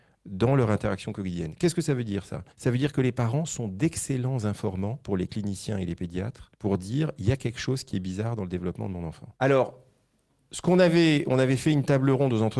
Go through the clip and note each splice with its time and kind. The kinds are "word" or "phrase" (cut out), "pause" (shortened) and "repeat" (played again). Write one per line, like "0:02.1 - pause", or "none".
0:02.5 - pause
0:06.5 - pause
0:09.4 - pause